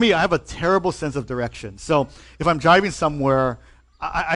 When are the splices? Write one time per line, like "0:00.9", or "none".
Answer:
none

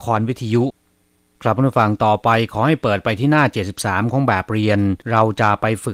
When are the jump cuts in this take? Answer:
0:05.0

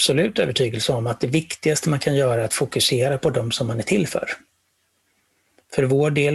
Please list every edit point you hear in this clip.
none

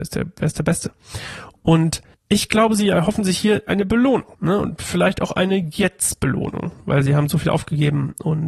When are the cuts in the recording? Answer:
0:02.1
0:04.3

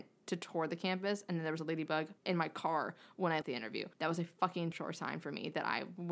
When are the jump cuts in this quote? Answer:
0:02.2
0:03.4
0:03.9
0:04.7

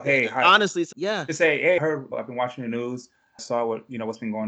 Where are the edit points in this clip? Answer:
0:00.9
0:01.8
0:02.1
0:03.4

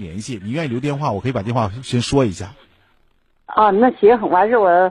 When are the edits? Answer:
none

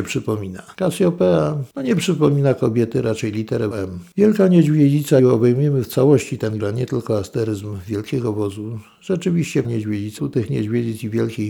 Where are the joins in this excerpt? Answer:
0:03.7
0:05.2
0:06.6
0:09.6
0:10.2

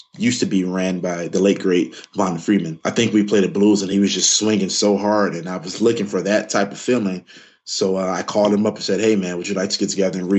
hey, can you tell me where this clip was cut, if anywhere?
none

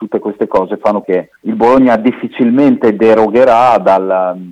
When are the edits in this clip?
0:01.0
0:01.4

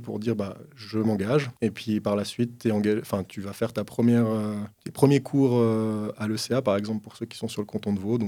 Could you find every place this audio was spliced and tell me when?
0:01.6
0:04.7

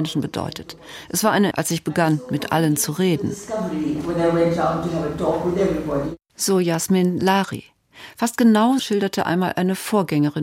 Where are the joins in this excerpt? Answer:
0:01.5
0:08.8

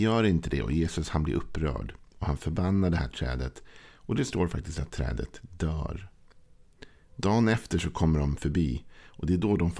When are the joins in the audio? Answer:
none

